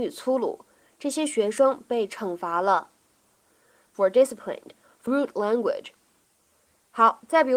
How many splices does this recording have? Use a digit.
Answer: 2